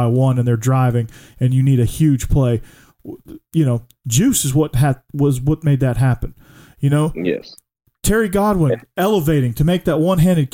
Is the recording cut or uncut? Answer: uncut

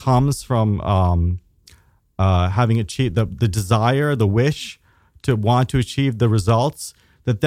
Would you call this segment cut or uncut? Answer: uncut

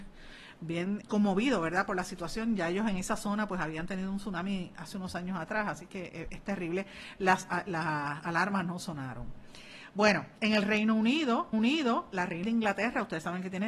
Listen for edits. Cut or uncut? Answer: cut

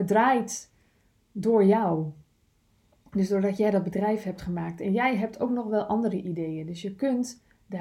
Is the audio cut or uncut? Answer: uncut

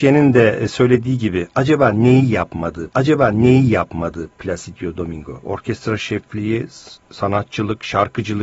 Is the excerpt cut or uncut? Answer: cut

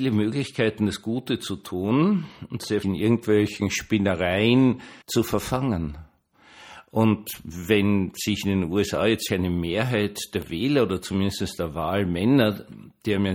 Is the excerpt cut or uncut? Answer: cut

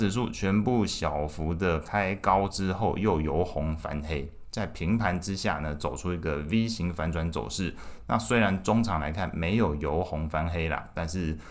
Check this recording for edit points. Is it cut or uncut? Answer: uncut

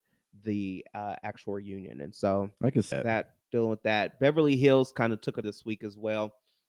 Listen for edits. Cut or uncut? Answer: cut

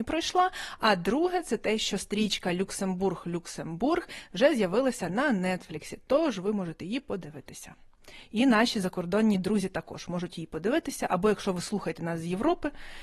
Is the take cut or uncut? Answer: uncut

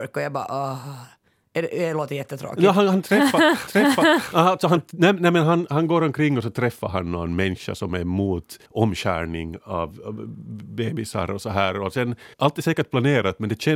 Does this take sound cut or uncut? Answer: cut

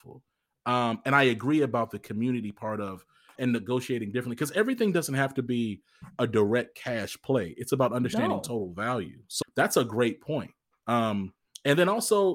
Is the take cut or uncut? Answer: cut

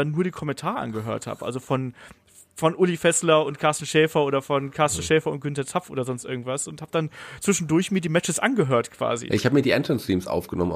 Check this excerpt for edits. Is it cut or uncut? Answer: uncut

